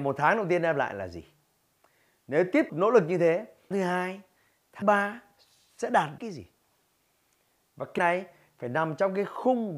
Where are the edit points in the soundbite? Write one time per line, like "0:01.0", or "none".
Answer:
0:02.7
0:03.7
0:04.8
0:06.2
0:08.0